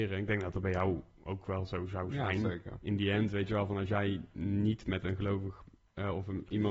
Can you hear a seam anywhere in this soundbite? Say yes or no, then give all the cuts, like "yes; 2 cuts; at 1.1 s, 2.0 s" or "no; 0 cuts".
no; 0 cuts